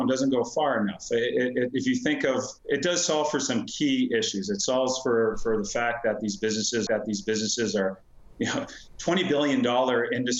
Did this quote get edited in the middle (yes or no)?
yes